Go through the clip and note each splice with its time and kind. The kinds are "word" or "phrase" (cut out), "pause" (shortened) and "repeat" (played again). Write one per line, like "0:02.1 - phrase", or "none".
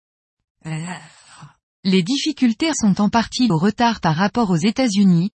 0:02.7 - word
0:03.5 - word